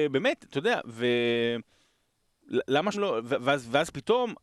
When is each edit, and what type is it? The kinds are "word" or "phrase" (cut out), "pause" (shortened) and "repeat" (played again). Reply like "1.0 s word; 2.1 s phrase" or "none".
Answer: 2.9 s word

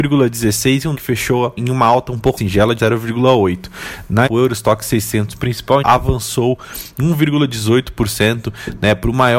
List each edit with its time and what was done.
0.9 s word; 1.6 s word; 2.4 s word; 2.8 s word; 4.3 s word; 5.8 s word

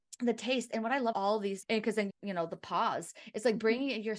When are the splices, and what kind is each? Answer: 1.1 s word; 1.6 s word; 2.1 s phrase

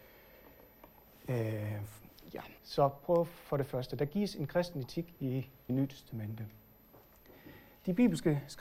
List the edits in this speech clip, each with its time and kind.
2.6 s pause; 5.7 s phrase

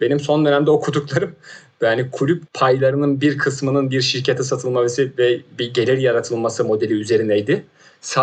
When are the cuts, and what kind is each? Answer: 2.5 s phrase

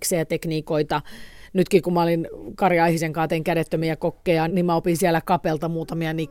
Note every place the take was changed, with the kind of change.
4.5 s word

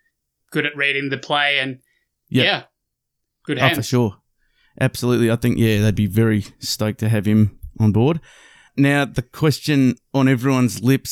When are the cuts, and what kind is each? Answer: none

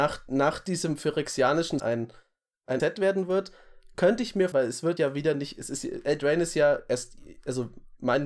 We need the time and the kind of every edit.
1.8 s phrase; 2.8 s word; 4.5 s word; 5.0 s word

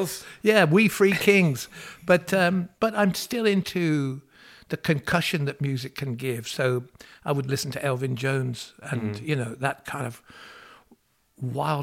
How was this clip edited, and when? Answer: none

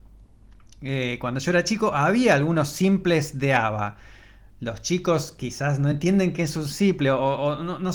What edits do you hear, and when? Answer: none

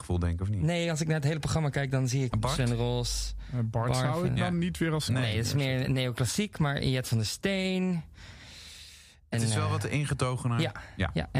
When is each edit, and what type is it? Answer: 2.3 s word; 5.1 s word; 9.3 s word

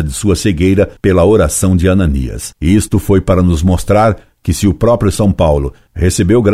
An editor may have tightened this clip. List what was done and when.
1.0 s pause; 2.6 s pause

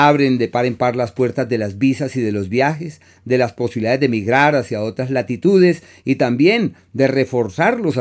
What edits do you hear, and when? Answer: none

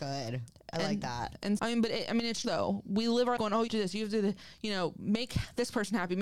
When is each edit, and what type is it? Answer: 1.6 s word; 2.4 s word; 3.4 s word; 3.7 s word

